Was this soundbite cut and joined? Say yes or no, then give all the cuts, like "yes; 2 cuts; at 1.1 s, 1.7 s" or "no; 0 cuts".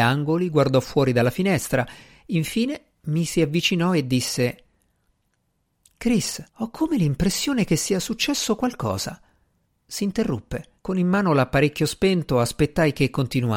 yes; 3 cuts; at 6.5 s, 9.7 s, 10.8 s